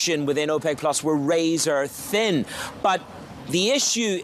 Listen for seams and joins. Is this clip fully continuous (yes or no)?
yes